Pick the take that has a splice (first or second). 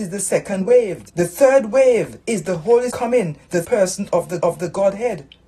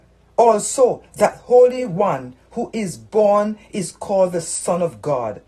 first